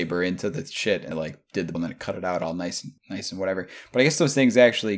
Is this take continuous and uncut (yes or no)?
no